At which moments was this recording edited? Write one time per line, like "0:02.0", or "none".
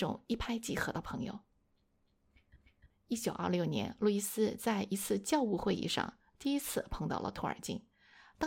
none